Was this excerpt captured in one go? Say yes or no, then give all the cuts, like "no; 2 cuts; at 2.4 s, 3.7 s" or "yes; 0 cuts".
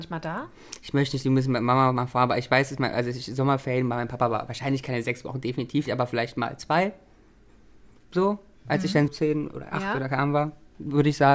no; 2 cuts; at 5.9 s, 9.1 s